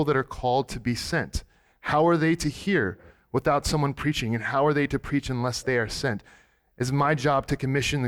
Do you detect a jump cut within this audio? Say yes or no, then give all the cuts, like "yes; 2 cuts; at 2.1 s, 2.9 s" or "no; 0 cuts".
no; 0 cuts